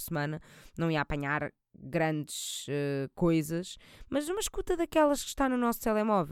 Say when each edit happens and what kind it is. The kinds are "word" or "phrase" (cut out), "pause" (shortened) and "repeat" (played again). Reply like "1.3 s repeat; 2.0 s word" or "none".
none